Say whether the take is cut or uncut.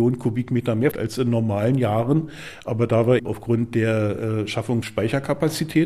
cut